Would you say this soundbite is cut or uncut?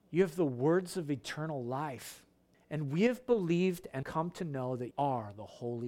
cut